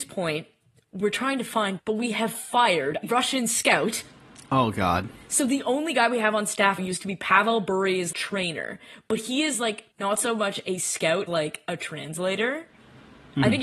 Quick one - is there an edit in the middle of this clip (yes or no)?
yes